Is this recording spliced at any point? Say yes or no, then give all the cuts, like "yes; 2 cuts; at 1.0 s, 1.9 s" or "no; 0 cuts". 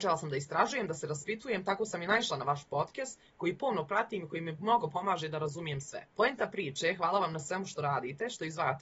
yes; 1 cut; at 6.1 s